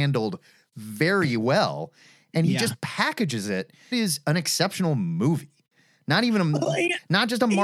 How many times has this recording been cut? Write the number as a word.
one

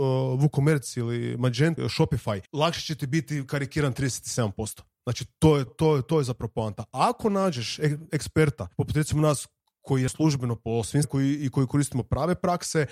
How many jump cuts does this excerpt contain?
six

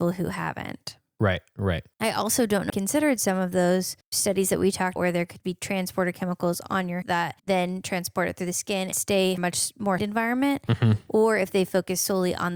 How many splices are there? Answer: nine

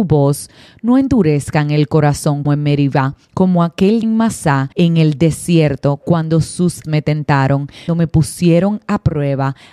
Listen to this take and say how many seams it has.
six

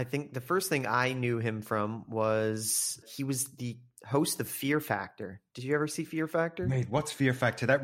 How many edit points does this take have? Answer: two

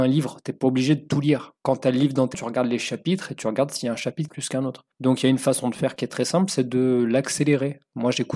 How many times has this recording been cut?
three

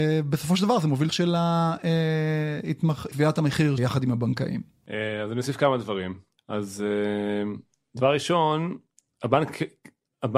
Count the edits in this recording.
four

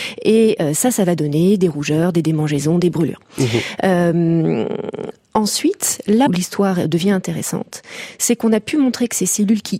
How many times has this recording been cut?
one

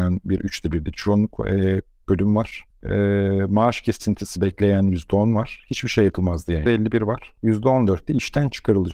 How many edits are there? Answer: three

